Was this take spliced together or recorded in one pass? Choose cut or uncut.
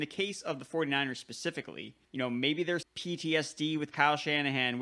cut